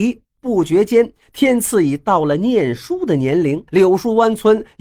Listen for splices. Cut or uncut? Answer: cut